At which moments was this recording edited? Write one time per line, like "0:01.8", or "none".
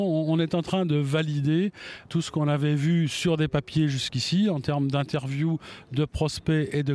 0:02.1